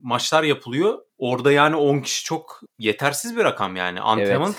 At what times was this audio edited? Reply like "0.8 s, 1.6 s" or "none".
1.1 s

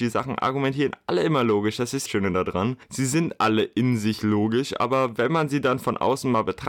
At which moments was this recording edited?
2.1 s

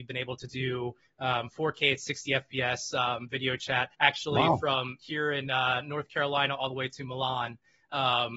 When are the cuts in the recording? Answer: 3.9 s

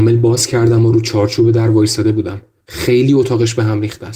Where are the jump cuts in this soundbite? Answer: none

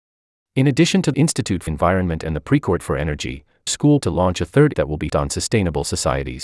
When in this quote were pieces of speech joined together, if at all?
1.1 s, 1.7 s, 2.8 s, 3.7 s, 4.0 s, 4.7 s, 5.1 s

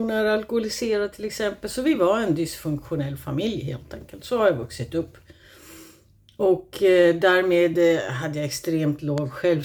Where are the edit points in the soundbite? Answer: none

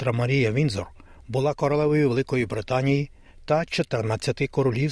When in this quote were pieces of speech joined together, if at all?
none

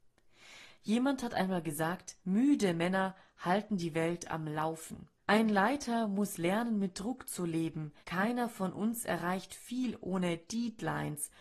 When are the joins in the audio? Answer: 2.2 s, 5.2 s, 8.0 s

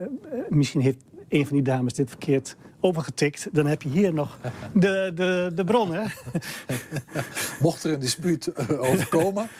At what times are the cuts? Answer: 2.1 s

